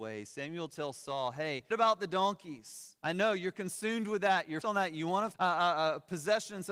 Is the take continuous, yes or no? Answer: no